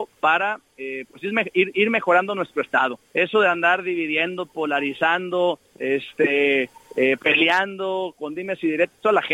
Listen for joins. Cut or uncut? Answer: cut